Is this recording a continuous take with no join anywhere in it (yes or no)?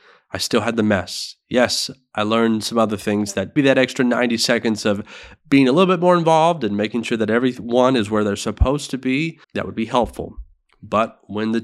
no